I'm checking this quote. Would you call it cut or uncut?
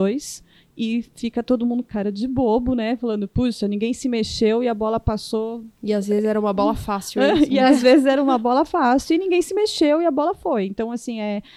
cut